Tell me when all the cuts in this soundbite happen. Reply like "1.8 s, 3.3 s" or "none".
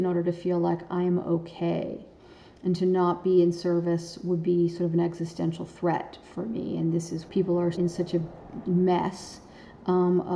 7.3 s, 7.7 s, 8.6 s